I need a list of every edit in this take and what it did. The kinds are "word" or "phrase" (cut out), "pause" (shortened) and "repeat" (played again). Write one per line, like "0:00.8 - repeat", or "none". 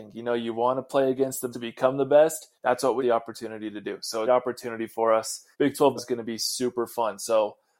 0:01.5 - word
0:02.6 - pause
0:03.0 - word
0:04.3 - phrase
0:05.5 - pause
0:06.0 - word